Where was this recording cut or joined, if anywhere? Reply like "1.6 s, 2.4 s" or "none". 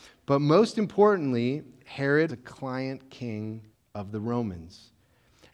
2.3 s, 3.7 s